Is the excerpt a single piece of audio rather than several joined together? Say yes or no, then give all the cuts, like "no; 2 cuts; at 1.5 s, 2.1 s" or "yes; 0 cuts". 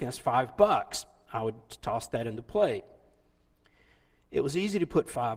yes; 0 cuts